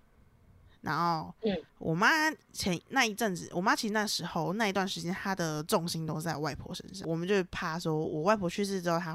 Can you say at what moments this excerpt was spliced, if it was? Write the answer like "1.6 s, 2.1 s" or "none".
1.7 s